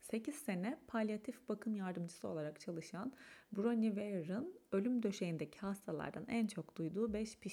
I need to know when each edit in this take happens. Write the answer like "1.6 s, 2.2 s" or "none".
none